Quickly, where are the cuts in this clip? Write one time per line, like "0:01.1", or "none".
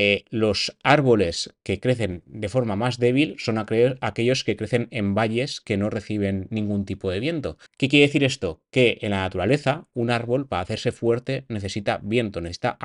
0:07.7